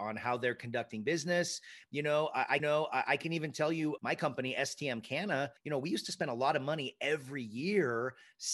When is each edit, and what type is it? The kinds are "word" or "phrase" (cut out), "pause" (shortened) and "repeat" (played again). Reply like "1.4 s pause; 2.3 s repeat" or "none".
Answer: 2.6 s repeat; 4.0 s word; 5.6 s pause